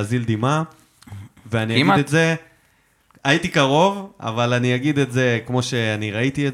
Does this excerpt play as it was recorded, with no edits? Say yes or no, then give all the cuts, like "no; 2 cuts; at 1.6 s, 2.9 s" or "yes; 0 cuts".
yes; 0 cuts